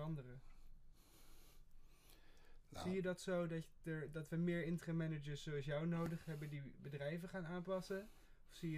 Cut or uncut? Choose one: uncut